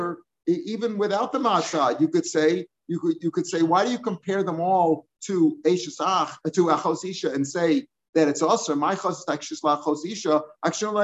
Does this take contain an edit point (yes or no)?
no